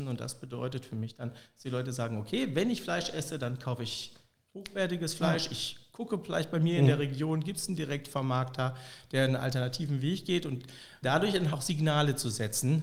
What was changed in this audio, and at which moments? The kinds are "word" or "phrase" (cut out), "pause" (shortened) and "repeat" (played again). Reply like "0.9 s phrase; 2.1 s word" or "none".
11.0 s word; 11.5 s word

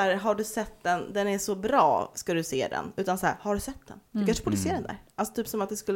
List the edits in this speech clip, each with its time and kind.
4.1 s pause

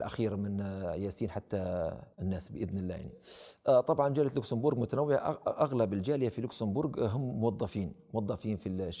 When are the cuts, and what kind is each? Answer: 2.1 s pause

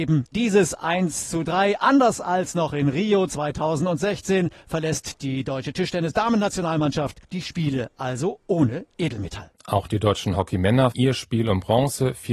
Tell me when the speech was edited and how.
7.2 s pause; 9.5 s pause; 10.9 s word

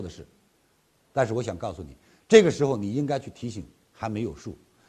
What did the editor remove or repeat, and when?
none

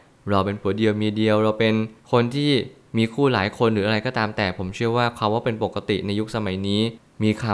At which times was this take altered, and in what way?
2.0 s pause

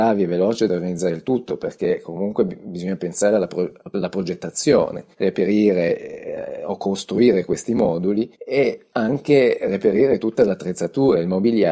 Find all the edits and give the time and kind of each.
5.1 s pause; 8.3 s pause

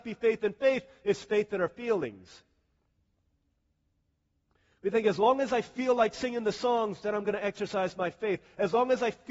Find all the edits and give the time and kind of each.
none

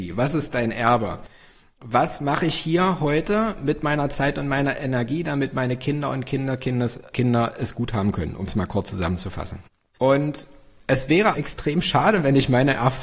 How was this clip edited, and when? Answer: 11.3 s word

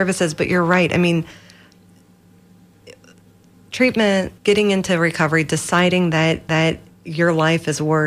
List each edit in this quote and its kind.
4.4 s pause; 6.5 s repeat

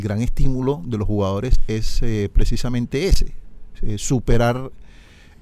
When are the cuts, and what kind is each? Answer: none

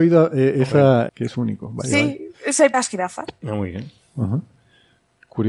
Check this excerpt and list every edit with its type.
1.1 s phrase; 2.3 s pause; 2.7 s phrase

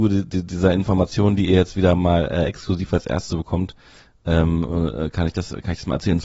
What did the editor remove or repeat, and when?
none

